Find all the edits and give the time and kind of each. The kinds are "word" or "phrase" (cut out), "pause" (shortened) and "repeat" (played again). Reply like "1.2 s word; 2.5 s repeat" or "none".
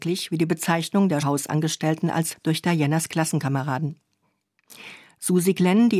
1.2 s word; 2.3 s word